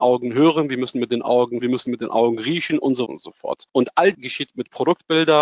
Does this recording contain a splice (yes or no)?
yes